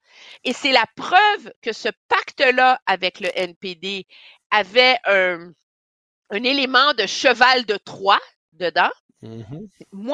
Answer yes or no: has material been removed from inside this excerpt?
no